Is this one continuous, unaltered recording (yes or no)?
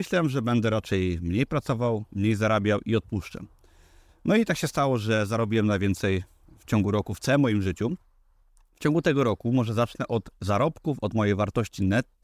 yes